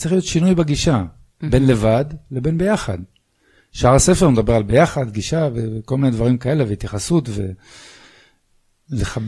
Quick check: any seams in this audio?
no; 0 cuts

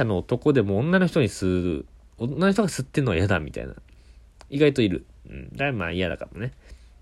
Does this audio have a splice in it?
no; 0 cuts

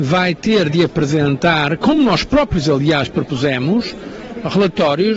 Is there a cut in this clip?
no; 0 cuts

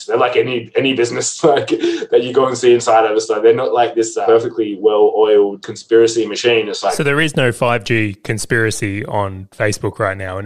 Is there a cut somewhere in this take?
no; 0 cuts

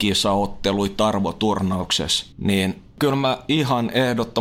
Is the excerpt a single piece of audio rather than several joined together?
no; 1 cut; at 2.3 s

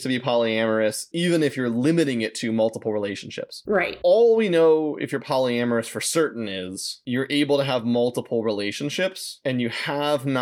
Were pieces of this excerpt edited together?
no; 0 cuts

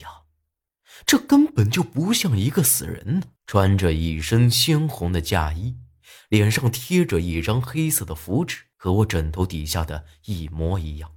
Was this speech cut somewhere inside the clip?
yes; 2 cuts; at 3.4 s, 8.7 s

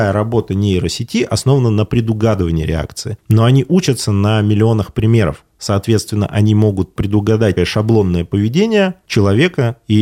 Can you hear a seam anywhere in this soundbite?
yes; 1 cut; at 7.6 s

